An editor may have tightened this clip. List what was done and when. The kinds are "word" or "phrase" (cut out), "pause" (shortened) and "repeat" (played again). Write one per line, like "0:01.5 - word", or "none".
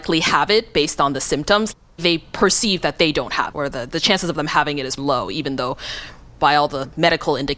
0:03.5 - word
0:05.0 - word